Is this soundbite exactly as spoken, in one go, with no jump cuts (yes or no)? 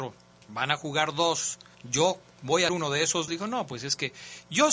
no